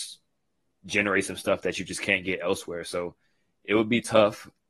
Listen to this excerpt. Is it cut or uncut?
uncut